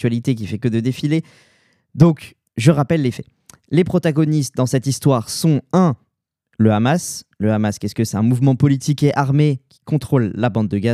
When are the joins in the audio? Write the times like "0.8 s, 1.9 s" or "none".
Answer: 8.1 s